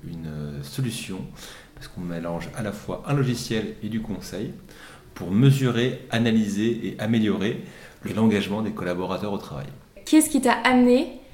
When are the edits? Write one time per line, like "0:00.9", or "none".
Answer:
0:08.0